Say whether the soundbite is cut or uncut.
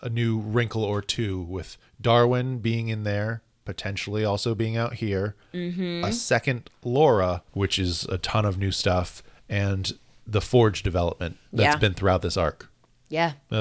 cut